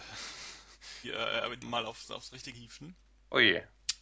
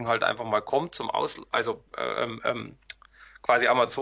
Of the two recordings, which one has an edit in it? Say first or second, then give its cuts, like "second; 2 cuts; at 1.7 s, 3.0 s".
first; 3 cuts; at 1.0 s, 1.6 s, 2.5 s